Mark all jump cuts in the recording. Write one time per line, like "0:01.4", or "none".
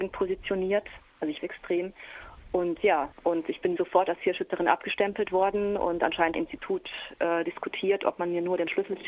0:01.4
0:03.1
0:03.8
0:06.3